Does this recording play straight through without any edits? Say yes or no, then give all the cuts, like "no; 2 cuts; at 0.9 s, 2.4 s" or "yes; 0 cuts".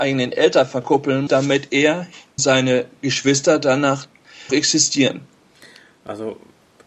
no; 3 cuts; at 1.3 s, 2.4 s, 4.5 s